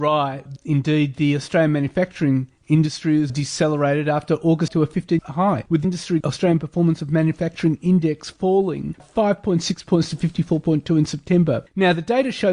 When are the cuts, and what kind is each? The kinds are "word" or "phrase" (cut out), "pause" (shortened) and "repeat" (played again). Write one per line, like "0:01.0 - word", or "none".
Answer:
0:03.3 - word
0:04.7 - word
0:05.2 - word
0:05.8 - word
0:06.2 - word
0:09.0 - word